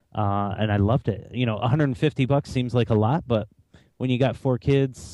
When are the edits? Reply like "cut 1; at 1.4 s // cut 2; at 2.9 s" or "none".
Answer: none